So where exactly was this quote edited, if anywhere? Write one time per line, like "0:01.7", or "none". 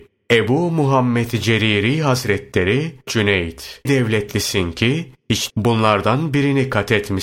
0:03.1
0:03.9
0:05.5